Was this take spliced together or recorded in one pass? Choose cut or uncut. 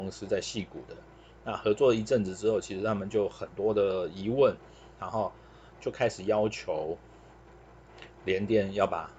uncut